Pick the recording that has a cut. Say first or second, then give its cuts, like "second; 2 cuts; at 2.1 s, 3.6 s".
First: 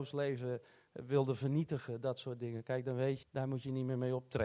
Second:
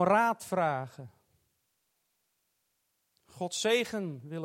first; 1 cut; at 3.2 s